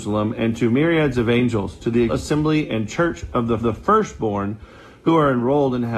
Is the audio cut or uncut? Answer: cut